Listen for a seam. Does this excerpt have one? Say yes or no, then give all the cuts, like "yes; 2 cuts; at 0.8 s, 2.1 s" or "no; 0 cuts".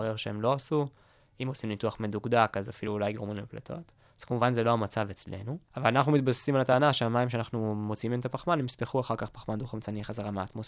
no; 0 cuts